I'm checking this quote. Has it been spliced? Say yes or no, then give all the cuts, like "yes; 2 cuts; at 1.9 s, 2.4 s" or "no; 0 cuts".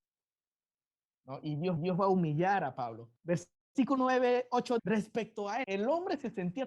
yes; 4 cuts; at 1.8 s, 3.2 s, 4.8 s, 5.6 s